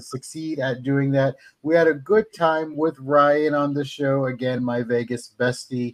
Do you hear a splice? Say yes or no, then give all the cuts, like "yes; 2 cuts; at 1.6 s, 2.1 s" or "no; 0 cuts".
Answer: no; 0 cuts